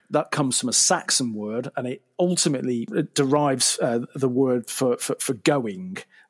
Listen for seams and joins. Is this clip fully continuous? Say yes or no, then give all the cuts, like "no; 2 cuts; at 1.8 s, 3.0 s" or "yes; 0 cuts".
yes; 0 cuts